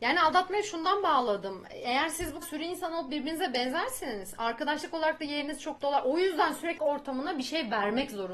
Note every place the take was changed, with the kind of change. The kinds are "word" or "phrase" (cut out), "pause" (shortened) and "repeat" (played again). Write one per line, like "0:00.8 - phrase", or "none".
0:02.4 - word
0:05.8 - word
0:06.8 - word

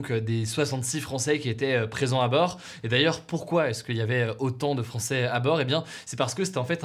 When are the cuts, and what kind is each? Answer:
none

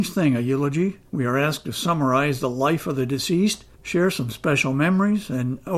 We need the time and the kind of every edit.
0:01.1 - pause
0:03.7 - pause

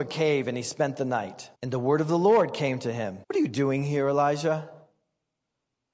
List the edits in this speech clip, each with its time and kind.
0:01.5 - pause
0:03.2 - pause

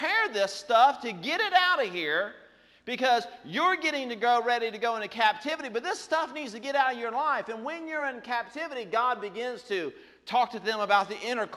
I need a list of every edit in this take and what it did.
none

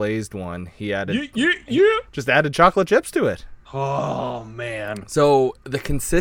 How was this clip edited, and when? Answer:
0:03.6 - pause

